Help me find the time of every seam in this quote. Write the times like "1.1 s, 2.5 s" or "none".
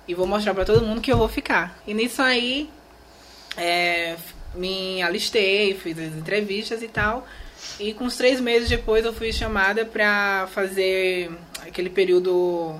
1.8 s

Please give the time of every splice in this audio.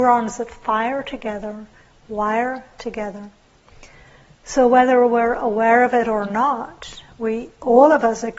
none

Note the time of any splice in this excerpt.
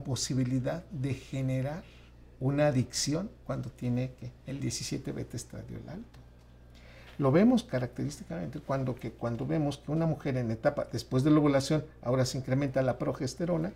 3.4 s, 4.4 s

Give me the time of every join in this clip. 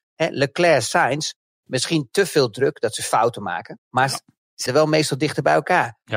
4.7 s

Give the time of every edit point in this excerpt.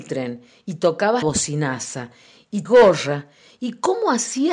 1.2 s, 2.6 s

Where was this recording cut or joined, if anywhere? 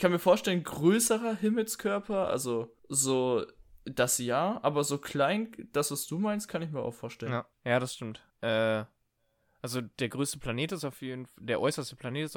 2.8 s, 7.5 s, 8.3 s

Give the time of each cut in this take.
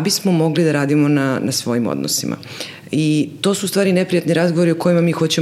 none

